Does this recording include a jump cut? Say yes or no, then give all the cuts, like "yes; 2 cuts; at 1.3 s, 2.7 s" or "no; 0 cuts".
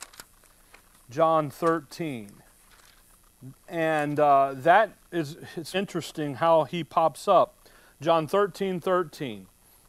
yes; 2 cuts; at 3.7 s, 5.7 s